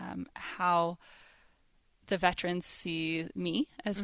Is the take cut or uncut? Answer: uncut